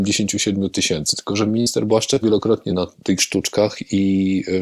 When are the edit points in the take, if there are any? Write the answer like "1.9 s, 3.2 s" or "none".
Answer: 2.2 s, 2.7 s, 3.2 s